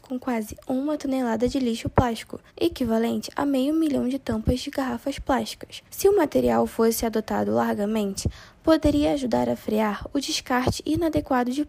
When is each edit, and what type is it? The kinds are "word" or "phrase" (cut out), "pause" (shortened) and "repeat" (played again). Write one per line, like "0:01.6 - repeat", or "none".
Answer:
0:02.5 - pause
0:05.9 - pause